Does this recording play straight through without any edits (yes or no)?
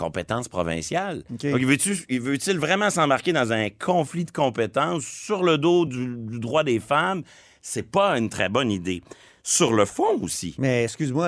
yes